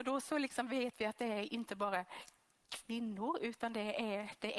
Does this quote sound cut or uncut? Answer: uncut